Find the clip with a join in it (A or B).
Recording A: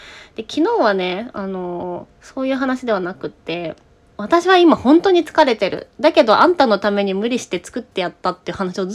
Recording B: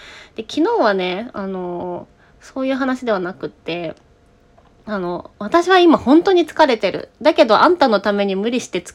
A